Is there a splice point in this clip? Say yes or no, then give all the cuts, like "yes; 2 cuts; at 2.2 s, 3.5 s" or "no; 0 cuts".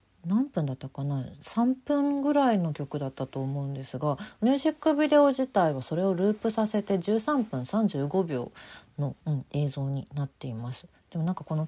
yes; 1 cut; at 9.2 s